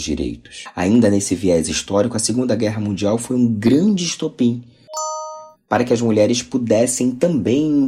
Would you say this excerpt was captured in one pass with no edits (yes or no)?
yes